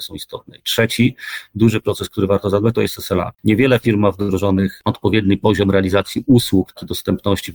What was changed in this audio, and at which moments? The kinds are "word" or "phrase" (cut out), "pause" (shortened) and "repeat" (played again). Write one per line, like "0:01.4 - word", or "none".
0:03.3 - pause